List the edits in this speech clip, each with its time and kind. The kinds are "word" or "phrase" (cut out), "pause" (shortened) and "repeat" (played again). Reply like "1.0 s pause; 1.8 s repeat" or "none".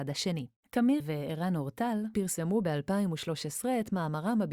1.0 s word